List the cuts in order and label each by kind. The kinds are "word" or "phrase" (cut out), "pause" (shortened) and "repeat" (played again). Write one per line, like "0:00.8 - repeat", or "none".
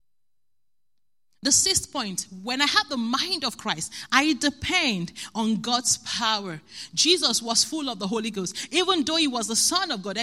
none